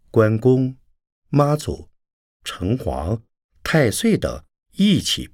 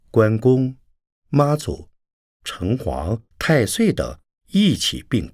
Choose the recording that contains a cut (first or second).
second